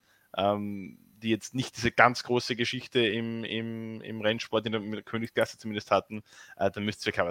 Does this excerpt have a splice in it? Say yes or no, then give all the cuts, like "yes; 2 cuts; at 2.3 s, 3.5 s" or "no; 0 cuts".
no; 0 cuts